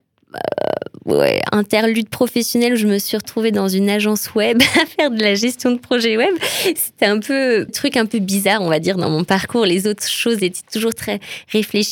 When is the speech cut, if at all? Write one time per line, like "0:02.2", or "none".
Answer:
0:07.7

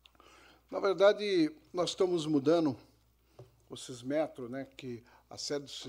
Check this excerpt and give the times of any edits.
0:01.7

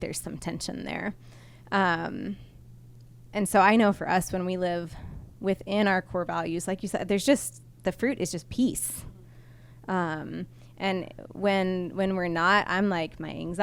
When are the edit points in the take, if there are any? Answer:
none

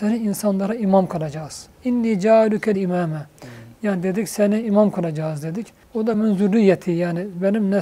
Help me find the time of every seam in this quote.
0:01.7
0:02.7
0:04.6
0:05.8
0:06.1

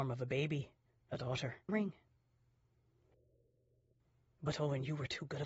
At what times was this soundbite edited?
0:01.7

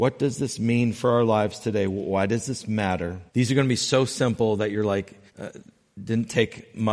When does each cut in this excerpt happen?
0:03.3
0:05.3

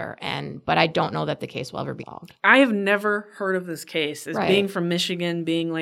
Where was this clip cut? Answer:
0:02.0

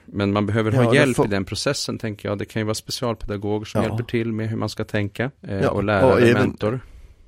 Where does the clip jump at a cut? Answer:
0:05.4

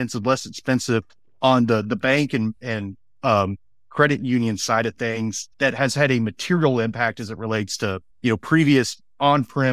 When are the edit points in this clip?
0:05.5
0:08.1

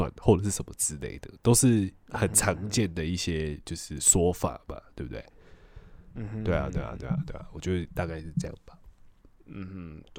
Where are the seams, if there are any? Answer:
none

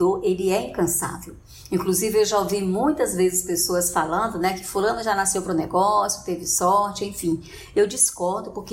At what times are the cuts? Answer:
none

